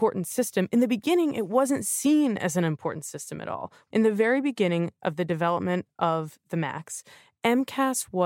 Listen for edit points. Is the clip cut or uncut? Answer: uncut